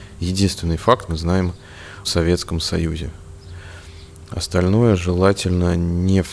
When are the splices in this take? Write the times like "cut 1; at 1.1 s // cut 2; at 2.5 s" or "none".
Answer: cut 1; at 1.1 s // cut 2; at 2.0 s